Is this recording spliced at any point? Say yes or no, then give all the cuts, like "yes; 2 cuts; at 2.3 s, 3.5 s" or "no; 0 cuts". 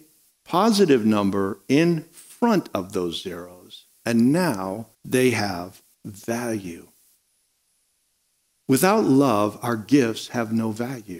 yes; 2 cuts; at 4.9 s, 5.9 s